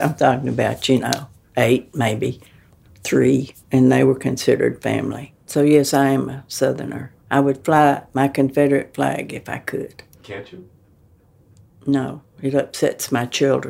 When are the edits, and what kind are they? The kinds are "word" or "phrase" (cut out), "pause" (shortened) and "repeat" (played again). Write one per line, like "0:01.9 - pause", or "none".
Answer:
0:03.6 - pause
0:05.4 - pause
0:07.2 - pause
0:10.1 - pause